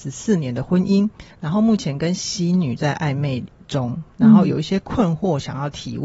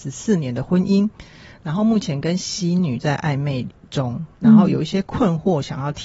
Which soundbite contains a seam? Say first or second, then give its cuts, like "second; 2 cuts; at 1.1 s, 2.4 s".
first; 1 cut; at 1.3 s